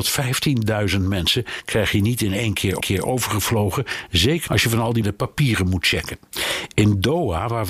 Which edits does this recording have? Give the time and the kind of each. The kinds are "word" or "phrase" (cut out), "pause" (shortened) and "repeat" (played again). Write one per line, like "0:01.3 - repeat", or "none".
0:02.8 - repeat
0:04.5 - word
0:05.0 - word